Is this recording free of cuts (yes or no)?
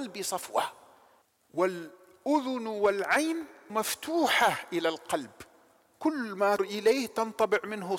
no